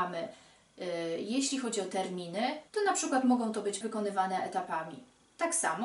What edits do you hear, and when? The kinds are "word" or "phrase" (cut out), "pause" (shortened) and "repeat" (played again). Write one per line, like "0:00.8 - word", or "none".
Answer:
0:02.7 - pause
0:03.8 - word